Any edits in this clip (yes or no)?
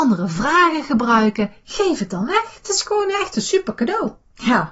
no